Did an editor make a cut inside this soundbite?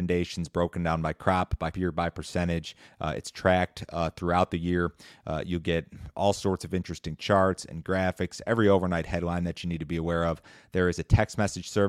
yes; 1 cut; at 1.7 s

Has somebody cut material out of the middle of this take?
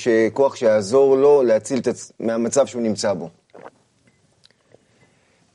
no; 0 cuts

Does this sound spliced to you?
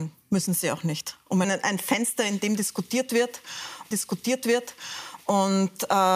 yes; 2 cuts; at 1.4 s, 3.9 s

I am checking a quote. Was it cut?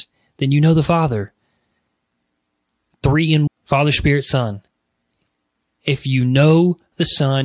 yes; 1 cut; at 3.5 s

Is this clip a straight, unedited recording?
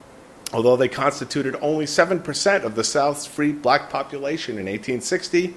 yes; 0 cuts

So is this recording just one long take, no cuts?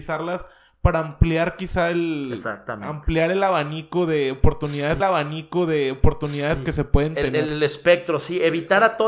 no; 1 cut; at 5.0 s

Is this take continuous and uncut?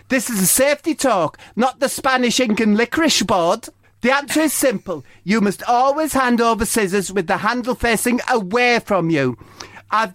no; 1 cut; at 3.8 s

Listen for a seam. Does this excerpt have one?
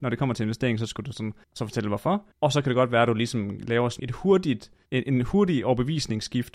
yes; 5 cuts; at 1.1 s, 1.4 s, 2.3 s, 4.0 s, 4.9 s

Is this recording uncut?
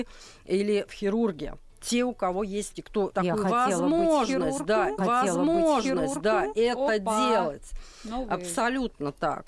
no; 3 cuts; at 2.7 s, 3.1 s, 5.0 s

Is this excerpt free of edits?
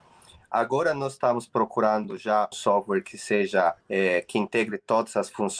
no; 2 cuts; at 2.5 s, 3.8 s

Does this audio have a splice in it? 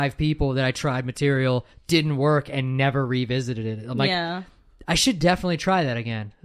no; 0 cuts

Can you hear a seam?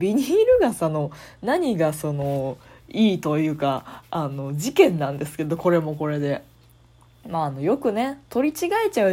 no; 0 cuts

